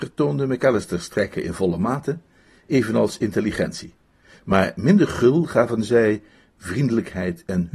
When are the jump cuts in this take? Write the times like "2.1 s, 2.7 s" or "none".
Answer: none